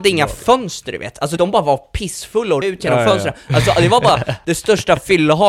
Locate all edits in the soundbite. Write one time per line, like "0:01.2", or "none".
0:01.4
0:02.6